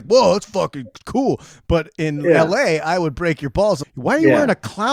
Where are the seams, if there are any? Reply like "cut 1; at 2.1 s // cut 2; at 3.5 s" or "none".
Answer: cut 1; at 3.8 s